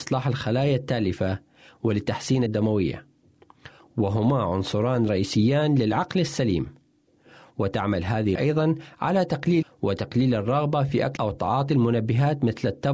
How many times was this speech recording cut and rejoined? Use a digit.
4